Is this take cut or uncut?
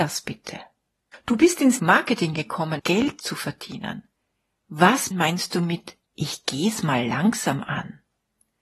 cut